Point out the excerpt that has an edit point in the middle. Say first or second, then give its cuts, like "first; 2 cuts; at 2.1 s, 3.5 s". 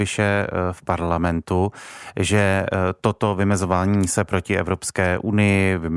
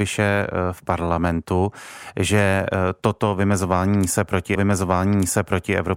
second; 1 cut; at 4.5 s